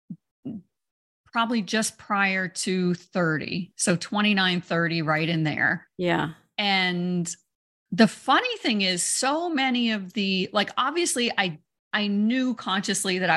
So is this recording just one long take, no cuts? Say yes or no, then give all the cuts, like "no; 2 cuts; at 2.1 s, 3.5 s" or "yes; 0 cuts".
yes; 0 cuts